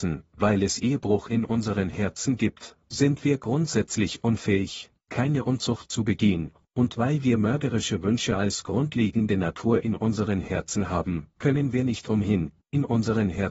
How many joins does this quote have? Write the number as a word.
zero